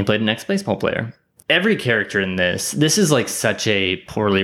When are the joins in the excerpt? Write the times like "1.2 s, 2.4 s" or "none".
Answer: 1.4 s